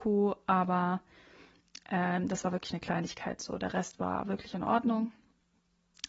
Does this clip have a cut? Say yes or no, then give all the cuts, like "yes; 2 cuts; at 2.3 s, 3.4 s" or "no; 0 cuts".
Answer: no; 0 cuts